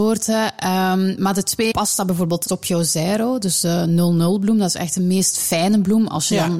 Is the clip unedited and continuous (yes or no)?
no